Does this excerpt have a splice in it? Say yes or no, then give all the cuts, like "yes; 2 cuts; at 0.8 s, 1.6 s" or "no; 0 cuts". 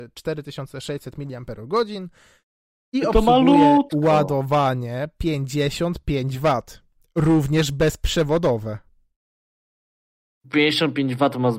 no; 0 cuts